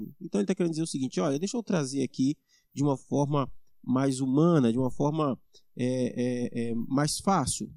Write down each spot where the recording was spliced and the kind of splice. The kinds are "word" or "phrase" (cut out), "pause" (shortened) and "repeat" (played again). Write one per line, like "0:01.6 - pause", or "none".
none